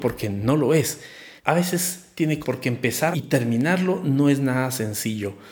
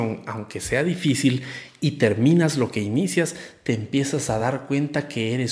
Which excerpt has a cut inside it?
first; 3 cuts; at 1.4 s, 2.4 s, 3.1 s

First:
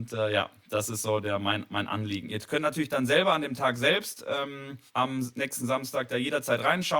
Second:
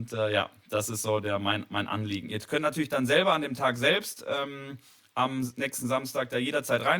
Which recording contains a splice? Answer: first; 1 cut; at 4.9 s

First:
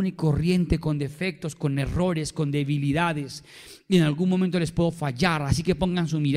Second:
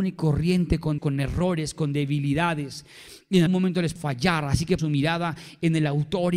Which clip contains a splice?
second; 4 cuts; at 1.0 s, 3.5 s, 4.0 s, 4.8 s

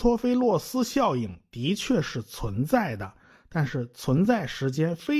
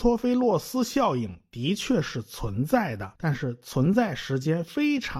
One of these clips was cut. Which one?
second; 1 cut; at 3.2 s

